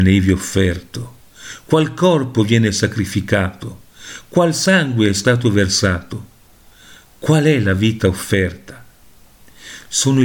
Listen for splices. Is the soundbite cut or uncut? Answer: uncut